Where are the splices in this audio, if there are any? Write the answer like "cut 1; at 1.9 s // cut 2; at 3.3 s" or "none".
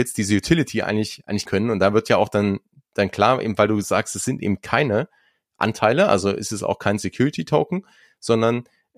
cut 1; at 1.5 s

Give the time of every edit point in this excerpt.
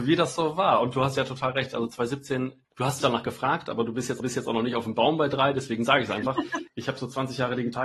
cut 1; at 2.6 s // cut 2; at 3.0 s // cut 3; at 4.2 s

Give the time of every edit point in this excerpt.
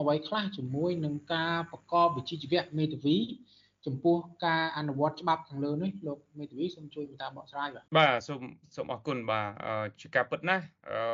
cut 1; at 7.9 s

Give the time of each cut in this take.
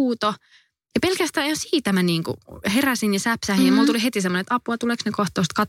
none

